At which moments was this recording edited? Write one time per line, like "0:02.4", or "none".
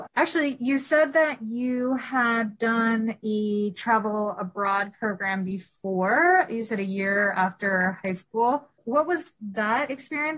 none